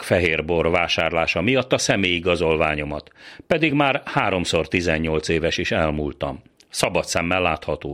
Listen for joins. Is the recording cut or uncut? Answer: uncut